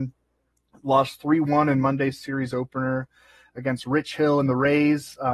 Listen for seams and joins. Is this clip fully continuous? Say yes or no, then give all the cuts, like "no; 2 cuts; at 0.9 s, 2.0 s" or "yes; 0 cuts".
yes; 0 cuts